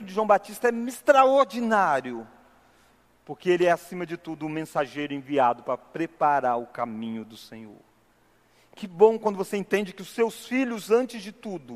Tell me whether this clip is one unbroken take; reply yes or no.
yes